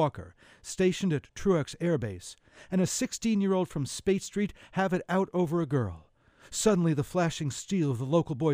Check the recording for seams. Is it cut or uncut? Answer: uncut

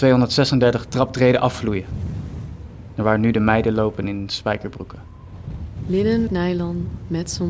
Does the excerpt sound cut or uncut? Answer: cut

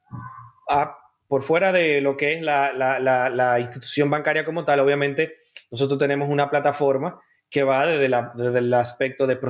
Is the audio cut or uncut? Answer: uncut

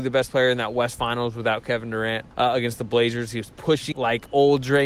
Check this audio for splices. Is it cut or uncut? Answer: cut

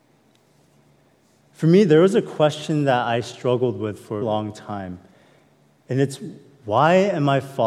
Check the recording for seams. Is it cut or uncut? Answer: cut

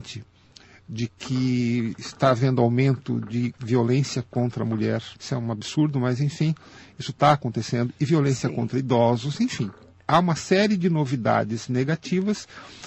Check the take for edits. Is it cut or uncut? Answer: cut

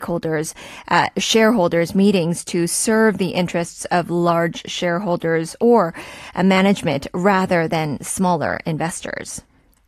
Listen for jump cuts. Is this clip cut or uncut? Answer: uncut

